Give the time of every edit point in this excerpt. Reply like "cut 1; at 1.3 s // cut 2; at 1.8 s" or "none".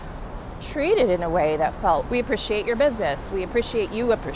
cut 1; at 2.0 s